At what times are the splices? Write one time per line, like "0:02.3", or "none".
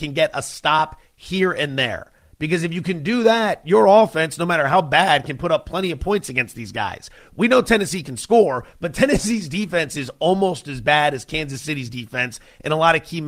none